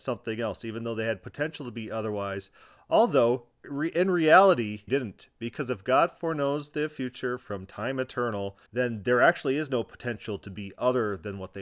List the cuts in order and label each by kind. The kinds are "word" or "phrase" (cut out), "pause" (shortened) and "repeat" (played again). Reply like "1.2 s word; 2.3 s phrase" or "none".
3.5 s pause; 4.9 s phrase; 8.7 s pause